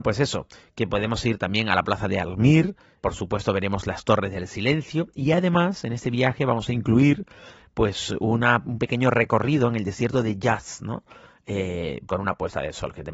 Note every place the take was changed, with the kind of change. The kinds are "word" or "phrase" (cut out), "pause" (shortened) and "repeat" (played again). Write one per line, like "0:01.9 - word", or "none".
0:03.0 - word
0:12.1 - word